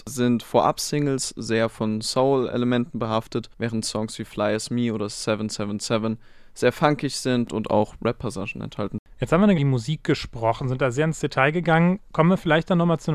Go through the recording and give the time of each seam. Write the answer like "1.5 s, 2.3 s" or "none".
3.5 s, 9.6 s